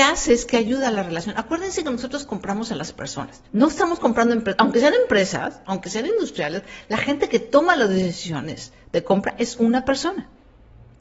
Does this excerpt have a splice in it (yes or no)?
yes